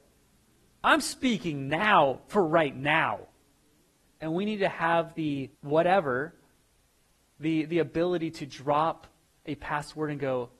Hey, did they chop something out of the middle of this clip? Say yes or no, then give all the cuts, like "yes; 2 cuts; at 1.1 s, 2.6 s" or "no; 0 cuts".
yes; 1 cut; at 5.5 s